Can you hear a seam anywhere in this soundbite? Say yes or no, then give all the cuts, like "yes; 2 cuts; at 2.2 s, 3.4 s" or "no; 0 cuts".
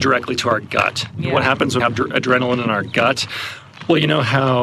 yes; 1 cut; at 1.8 s